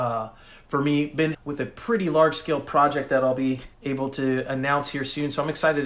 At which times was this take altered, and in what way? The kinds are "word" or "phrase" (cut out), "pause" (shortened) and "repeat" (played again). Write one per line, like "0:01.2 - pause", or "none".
0:01.3 - word
0:03.7 - pause